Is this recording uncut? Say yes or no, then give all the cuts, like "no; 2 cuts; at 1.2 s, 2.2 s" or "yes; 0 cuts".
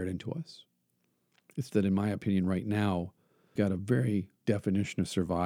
no; 3 cuts; at 1.7 s, 3.6 s, 4.4 s